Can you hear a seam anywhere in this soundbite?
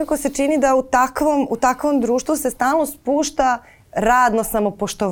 no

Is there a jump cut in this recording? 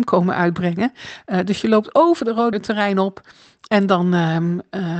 yes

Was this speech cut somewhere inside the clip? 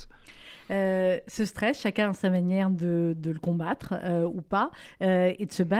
no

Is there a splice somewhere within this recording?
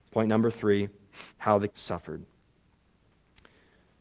yes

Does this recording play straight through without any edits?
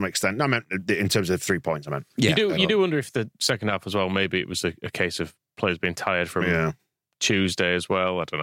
yes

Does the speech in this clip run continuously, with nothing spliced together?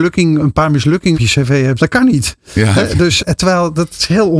no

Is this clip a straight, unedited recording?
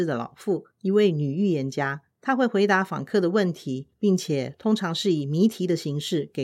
no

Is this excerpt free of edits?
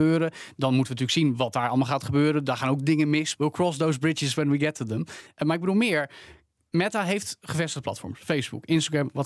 no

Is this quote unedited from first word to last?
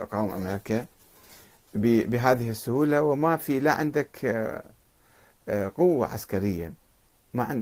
yes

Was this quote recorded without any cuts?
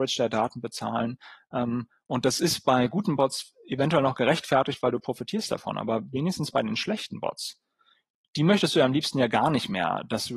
yes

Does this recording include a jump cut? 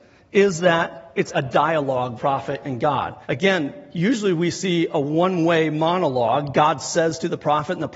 yes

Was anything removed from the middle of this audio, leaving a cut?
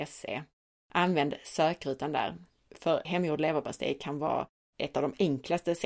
yes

